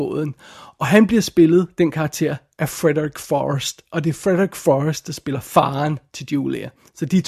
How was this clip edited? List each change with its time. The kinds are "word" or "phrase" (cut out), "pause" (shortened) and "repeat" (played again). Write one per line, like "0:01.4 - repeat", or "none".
none

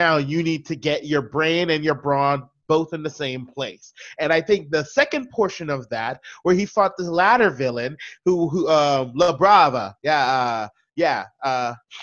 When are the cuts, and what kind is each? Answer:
none

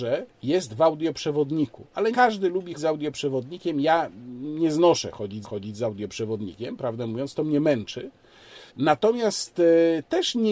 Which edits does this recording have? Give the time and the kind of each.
0:02.1 - word
0:02.7 - word
0:05.4 - repeat
0:08.7 - pause

